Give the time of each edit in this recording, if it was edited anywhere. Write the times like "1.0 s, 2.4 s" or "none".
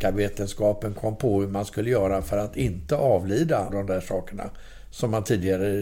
3.7 s